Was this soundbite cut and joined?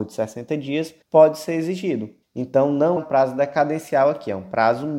yes; 3 cuts; at 1.0 s, 2.2 s, 3.0 s

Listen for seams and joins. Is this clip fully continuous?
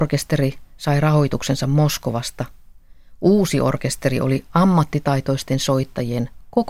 yes; 0 cuts

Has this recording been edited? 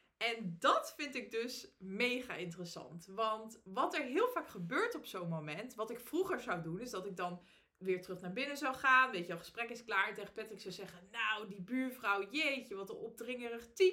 no; 0 cuts

